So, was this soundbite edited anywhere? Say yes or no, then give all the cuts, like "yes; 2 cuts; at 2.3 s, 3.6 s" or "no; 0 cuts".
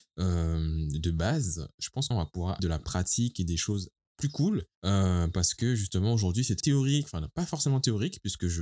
yes; 4 cuts; at 2.1 s, 2.6 s, 4.7 s, 6.6 s